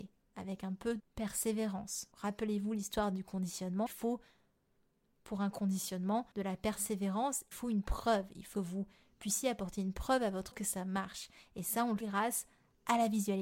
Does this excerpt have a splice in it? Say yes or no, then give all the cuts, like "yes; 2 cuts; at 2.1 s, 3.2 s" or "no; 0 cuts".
yes; 8 cuts; at 1.0 s, 2.1 s, 3.9 s, 6.3 s, 7.5 s, 8.5 s, 10.5 s, 12.0 s